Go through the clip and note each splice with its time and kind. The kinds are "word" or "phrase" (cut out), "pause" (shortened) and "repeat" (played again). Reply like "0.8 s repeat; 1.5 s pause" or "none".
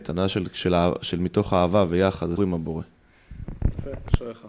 2.4 s word